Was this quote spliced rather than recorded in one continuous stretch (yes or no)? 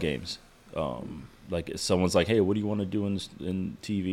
no